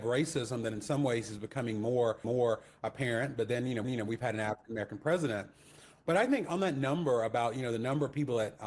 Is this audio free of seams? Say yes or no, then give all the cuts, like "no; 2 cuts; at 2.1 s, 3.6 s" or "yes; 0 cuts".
no; 2 cuts; at 2.2 s, 3.8 s